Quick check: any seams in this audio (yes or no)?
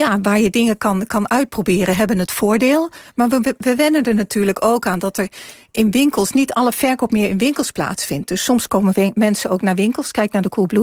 no